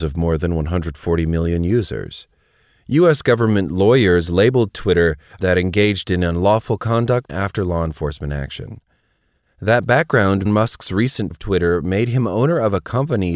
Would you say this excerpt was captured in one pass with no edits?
no; 4 cuts; at 5.4 s, 7.3 s, 10.5 s, 11.3 s

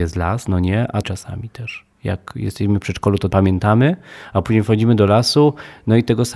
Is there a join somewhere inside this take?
yes; 3 cuts; at 1.0 s, 1.9 s, 3.3 s

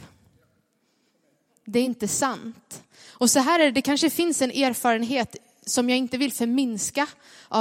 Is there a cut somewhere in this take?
no; 0 cuts

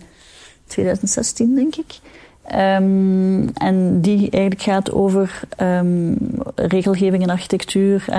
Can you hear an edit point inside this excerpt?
no; 0 cuts

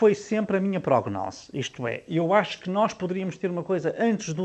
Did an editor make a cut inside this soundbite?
no; 0 cuts

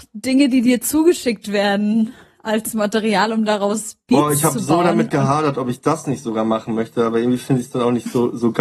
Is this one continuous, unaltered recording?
yes; 0 cuts

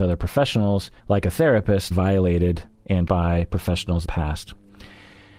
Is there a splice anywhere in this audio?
yes; 4 cuts; at 1.0 s, 1.9 s, 3.1 s, 4.0 s

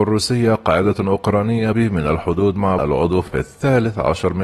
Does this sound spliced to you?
yes; 3 cuts; at 1.7 s, 2.8 s, 3.3 s

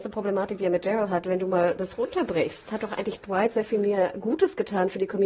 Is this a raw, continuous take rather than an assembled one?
yes; 0 cuts

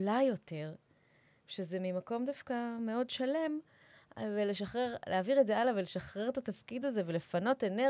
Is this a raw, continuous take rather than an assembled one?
yes; 0 cuts

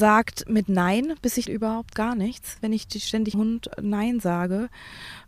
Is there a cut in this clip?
yes; 2 cuts; at 1.5 s, 3.3 s

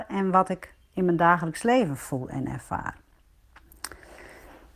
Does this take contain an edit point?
no; 0 cuts

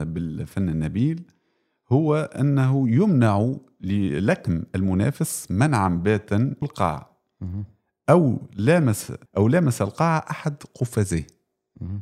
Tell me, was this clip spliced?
yes; 2 cuts; at 6.6 s, 9.3 s

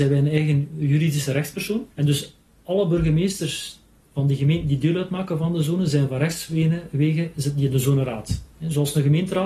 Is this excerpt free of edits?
no; 1 cut; at 1.9 s

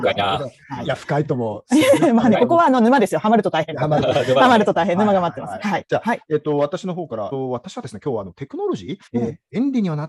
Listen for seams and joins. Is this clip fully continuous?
no; 1 cut; at 9.1 s

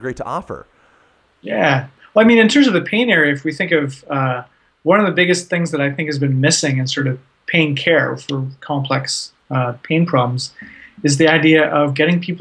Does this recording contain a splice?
no; 0 cuts

